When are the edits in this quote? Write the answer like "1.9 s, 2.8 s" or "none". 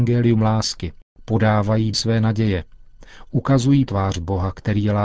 1.9 s, 3.9 s

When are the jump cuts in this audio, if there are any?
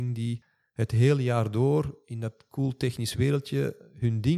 none

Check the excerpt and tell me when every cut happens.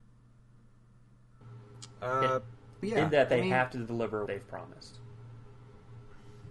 2.8 s, 4.3 s

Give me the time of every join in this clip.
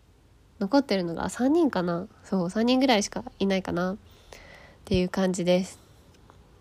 none

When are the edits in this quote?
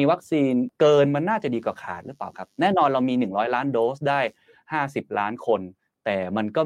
none

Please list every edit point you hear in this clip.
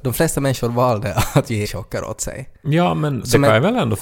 1.6 s

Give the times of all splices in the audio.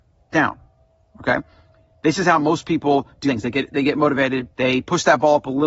3.3 s, 4.5 s

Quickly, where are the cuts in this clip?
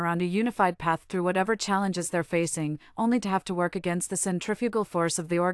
none

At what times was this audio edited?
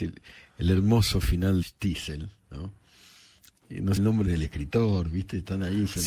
1.6 s, 4.0 s

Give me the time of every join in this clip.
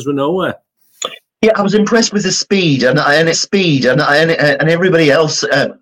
3.3 s

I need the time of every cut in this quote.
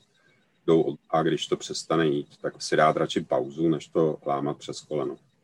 0.9 s, 2.6 s

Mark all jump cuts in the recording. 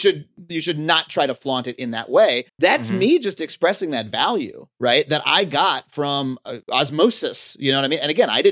2.5 s, 6.6 s

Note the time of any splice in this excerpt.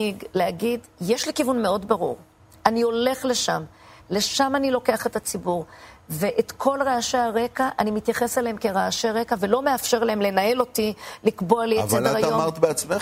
none

